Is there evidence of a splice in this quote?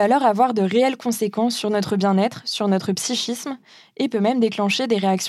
no; 0 cuts

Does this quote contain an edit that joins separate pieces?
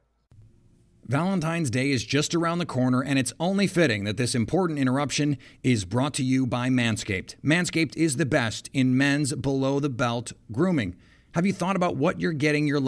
no; 0 cuts

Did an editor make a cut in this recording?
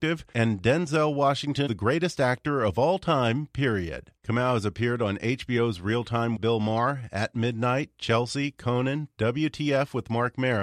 yes; 3 cuts; at 1.7 s, 4.2 s, 6.4 s

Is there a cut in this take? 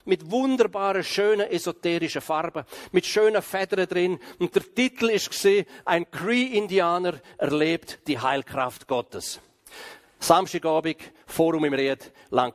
no; 0 cuts

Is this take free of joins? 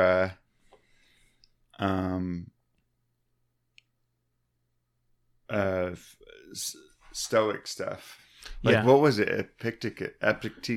yes; 0 cuts

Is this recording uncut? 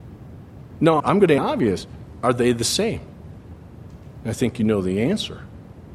no; 2 cuts; at 1.0 s, 1.4 s

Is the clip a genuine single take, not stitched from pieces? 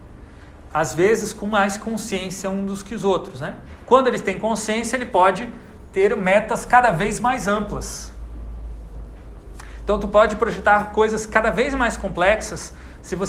yes; 0 cuts

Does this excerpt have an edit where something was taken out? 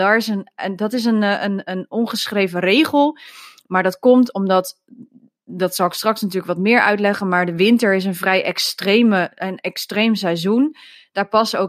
no; 0 cuts

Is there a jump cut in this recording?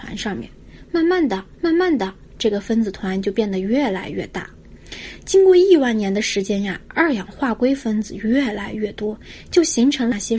yes; 1 cut; at 1.5 s

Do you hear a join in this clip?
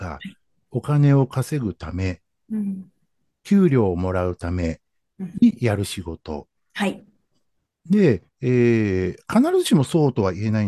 no; 0 cuts

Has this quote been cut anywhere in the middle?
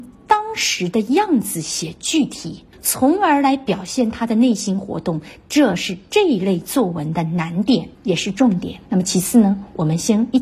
yes; 3 cuts; at 2.7 s, 7.9 s, 8.9 s

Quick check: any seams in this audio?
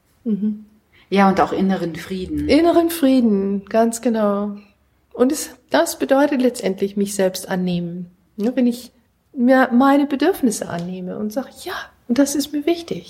no; 0 cuts

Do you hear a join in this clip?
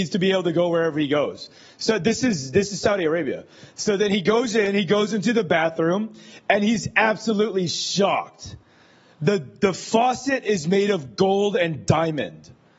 no; 0 cuts

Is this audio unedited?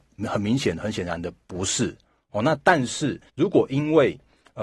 no; 1 cut; at 3.3 s

